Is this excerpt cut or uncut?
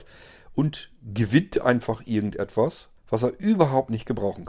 cut